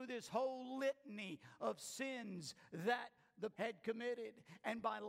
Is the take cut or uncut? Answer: cut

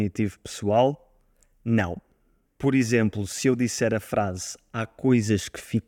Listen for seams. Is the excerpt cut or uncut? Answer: uncut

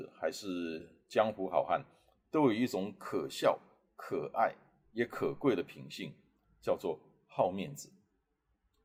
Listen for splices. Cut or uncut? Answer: uncut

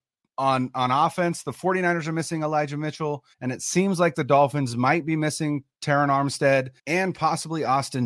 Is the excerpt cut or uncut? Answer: cut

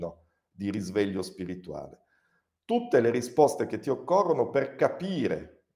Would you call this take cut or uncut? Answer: uncut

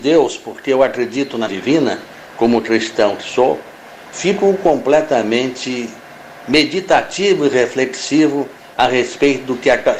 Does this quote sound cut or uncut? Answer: cut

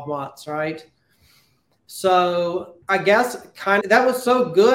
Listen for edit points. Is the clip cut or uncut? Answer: cut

